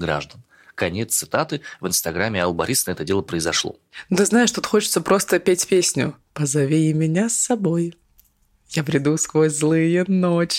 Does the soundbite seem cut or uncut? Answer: uncut